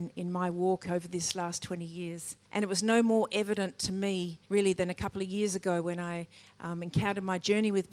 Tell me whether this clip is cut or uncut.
cut